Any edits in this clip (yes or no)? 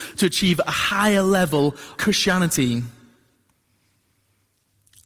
yes